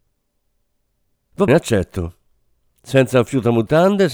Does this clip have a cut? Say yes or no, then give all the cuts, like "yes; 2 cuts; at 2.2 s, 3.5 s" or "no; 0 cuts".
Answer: yes; 1 cut; at 1.5 s